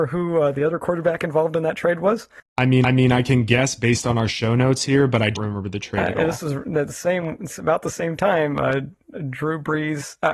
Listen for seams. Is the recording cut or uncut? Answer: cut